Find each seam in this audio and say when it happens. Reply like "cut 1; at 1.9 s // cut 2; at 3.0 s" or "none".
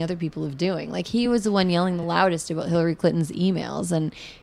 none